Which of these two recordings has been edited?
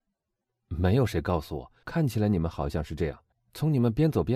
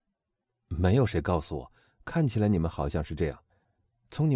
first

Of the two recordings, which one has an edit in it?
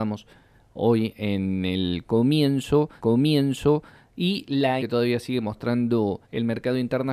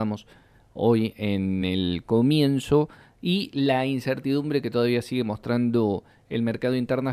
first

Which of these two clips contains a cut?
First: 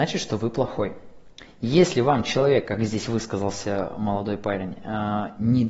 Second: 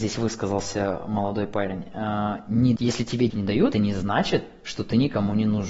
second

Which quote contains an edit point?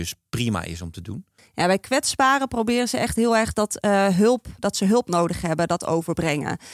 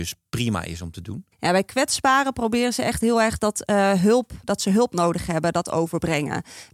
second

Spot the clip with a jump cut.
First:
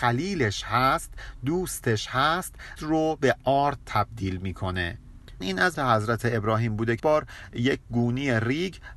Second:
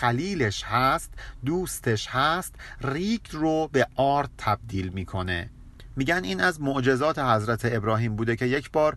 first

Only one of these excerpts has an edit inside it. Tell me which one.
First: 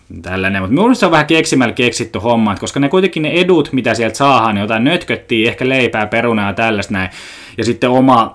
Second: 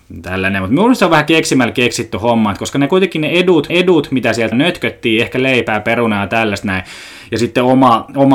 second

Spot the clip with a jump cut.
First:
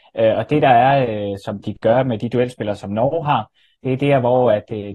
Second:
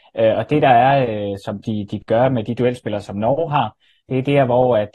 first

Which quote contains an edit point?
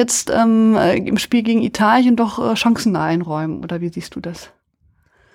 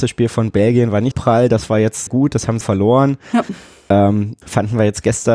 second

